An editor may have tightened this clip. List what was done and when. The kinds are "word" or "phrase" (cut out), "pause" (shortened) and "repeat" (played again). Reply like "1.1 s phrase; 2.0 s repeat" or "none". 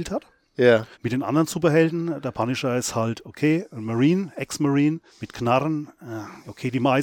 0.9 s pause; 5.1 s pause